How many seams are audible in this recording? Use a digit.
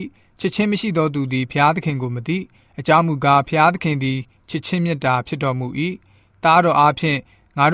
0